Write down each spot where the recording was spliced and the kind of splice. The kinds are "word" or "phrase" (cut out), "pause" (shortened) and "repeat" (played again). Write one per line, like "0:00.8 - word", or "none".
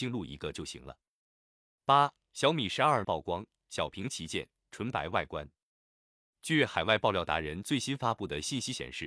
0:03.0 - word